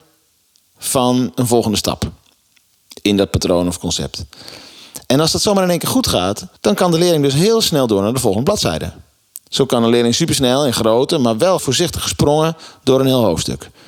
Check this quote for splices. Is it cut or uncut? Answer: cut